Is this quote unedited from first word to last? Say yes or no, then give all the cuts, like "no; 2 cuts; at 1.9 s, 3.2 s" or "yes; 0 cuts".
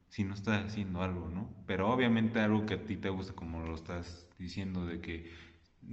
no; 1 cut; at 4.3 s